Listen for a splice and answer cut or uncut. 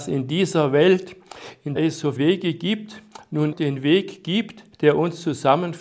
cut